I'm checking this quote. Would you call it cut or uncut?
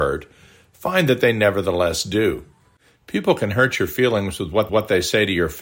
cut